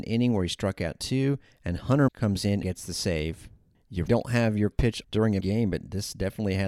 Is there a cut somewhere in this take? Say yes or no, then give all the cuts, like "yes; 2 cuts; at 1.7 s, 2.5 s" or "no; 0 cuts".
yes; 6 cuts; at 2.1 s, 2.6 s, 4.1 s, 4.7 s, 5.0 s, 5.4 s